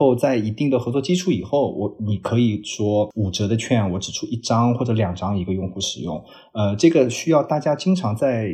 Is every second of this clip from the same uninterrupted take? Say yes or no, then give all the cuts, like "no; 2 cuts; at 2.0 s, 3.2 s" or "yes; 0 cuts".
yes; 0 cuts